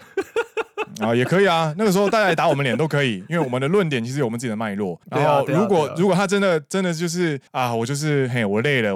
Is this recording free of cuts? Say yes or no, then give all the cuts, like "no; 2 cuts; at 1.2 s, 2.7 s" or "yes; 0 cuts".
no; 2 cuts; at 5.0 s, 7.5 s